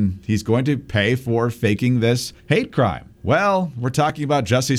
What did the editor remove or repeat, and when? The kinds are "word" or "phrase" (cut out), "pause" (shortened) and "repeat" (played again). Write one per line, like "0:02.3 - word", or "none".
0:02.4 - pause
0:03.1 - pause